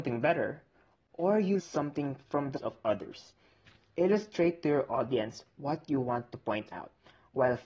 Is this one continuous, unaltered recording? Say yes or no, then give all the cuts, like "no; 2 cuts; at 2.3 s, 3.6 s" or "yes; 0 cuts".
no; 2 cuts; at 1.6 s, 2.6 s